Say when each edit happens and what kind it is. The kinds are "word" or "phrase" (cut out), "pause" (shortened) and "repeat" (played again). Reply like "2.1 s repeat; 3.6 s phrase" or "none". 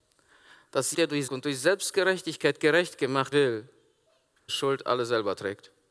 0.9 s word; 1.3 s word; 3.3 s word; 4.5 s phrase